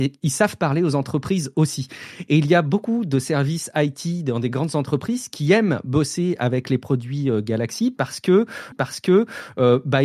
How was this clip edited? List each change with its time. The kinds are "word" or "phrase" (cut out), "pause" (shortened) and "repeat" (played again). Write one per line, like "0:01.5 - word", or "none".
0:08.7 - repeat